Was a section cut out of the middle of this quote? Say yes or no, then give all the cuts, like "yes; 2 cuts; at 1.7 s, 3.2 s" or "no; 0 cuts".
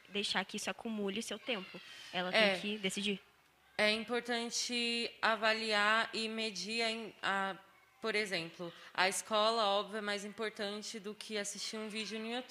no; 0 cuts